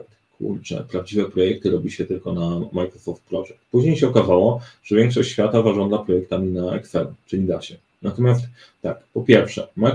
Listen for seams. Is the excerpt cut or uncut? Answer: uncut